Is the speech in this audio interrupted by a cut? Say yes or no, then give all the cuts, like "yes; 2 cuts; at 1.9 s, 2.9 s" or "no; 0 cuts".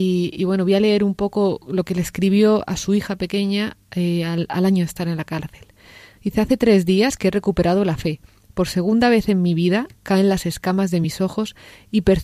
no; 0 cuts